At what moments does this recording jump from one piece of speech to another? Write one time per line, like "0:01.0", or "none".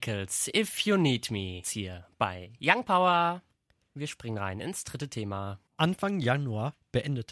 0:01.6
0:05.7